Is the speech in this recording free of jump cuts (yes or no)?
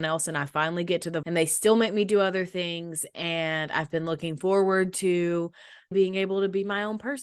no